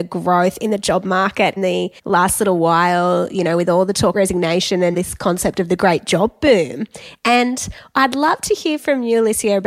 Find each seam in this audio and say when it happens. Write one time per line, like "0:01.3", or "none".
0:01.6
0:02.0
0:04.1
0:04.9